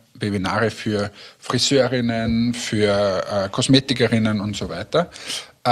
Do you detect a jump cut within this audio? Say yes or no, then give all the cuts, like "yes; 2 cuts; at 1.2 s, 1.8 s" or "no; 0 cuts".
no; 0 cuts